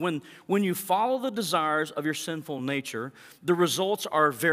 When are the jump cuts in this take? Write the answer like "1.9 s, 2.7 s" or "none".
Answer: none